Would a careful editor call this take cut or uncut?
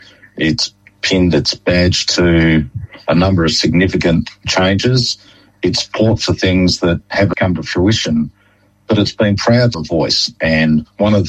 cut